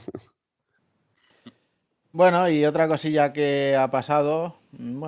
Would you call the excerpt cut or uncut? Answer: uncut